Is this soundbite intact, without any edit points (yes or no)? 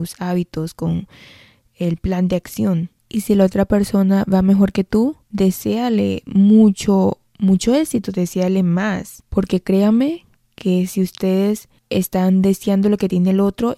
yes